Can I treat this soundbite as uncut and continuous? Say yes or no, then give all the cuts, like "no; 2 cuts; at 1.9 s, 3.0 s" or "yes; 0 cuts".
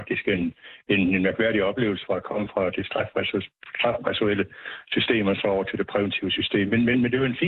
yes; 0 cuts